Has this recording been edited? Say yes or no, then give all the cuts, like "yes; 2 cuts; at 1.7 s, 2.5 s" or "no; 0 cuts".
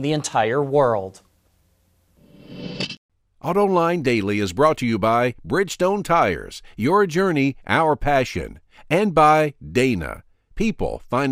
no; 0 cuts